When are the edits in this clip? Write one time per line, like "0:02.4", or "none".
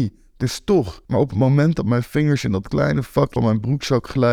0:01.0
0:03.4